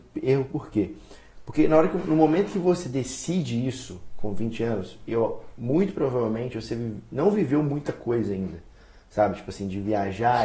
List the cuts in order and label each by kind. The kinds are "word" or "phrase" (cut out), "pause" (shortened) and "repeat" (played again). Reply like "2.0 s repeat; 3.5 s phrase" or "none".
none